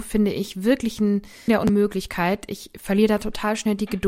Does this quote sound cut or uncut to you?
cut